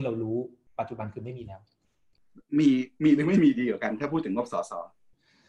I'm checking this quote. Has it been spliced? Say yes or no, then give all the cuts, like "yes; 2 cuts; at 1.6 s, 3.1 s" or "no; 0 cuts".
no; 0 cuts